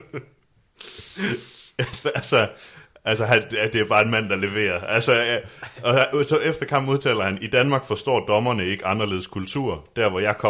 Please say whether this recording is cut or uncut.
uncut